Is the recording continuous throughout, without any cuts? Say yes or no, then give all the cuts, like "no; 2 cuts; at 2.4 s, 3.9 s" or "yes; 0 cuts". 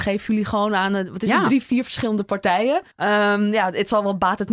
no; 1 cut; at 2.9 s